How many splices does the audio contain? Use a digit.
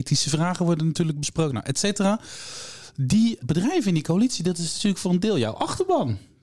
1